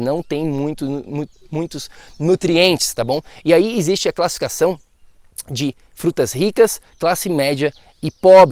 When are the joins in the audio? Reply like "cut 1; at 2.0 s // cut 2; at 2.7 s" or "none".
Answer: none